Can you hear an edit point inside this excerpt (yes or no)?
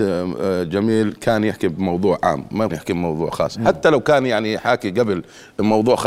yes